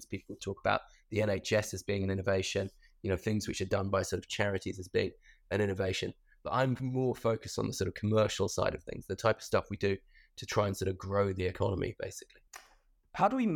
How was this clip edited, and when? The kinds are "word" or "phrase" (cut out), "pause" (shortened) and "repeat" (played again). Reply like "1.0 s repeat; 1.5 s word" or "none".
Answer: none